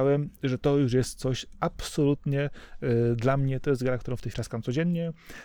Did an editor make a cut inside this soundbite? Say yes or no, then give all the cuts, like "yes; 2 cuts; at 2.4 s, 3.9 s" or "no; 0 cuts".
yes; 1 cut; at 4.3 s